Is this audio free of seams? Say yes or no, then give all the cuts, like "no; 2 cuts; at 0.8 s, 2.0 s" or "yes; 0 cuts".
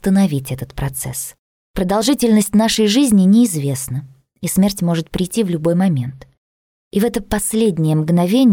yes; 0 cuts